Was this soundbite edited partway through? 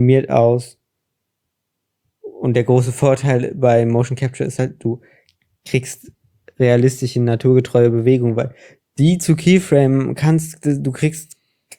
no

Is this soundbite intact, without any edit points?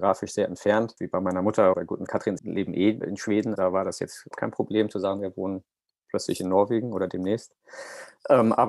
no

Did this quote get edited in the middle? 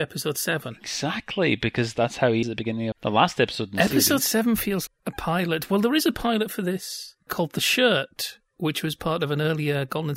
yes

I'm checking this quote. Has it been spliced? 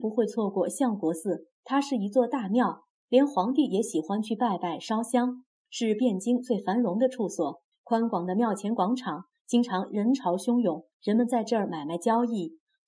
yes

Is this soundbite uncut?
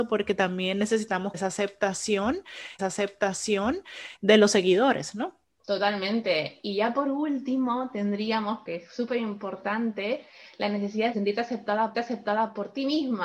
no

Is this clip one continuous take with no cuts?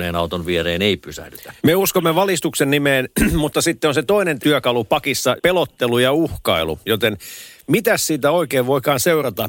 no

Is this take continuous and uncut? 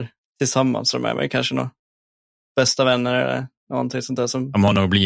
yes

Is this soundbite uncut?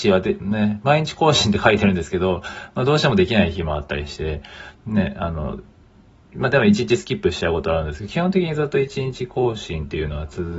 yes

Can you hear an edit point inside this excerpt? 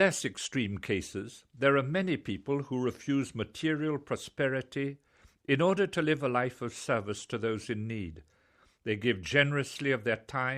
no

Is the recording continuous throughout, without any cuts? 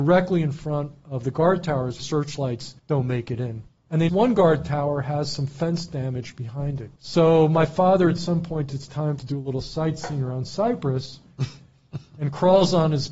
no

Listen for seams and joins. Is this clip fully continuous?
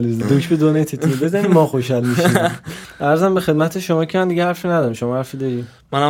yes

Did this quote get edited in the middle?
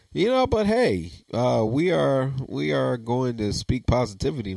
no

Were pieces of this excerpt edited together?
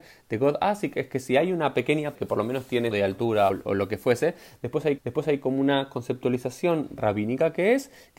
yes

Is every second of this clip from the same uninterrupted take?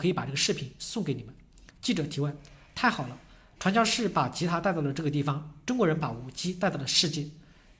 no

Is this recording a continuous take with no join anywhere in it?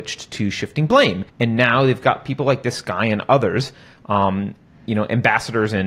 no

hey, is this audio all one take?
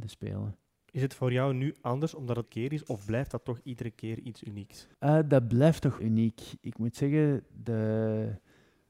no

